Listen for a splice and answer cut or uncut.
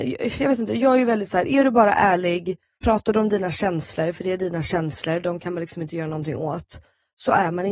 uncut